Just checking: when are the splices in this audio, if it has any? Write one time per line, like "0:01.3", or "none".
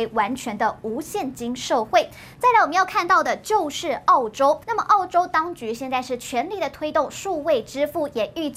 0:04.6